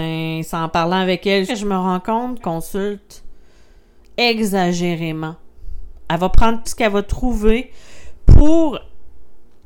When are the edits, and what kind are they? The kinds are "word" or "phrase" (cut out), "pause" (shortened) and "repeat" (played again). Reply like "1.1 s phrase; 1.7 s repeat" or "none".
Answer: 1.5 s phrase; 2.4 s phrase; 6.6 s word